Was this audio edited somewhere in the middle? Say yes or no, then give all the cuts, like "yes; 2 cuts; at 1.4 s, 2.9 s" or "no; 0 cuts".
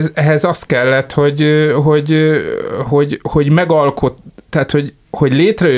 no; 0 cuts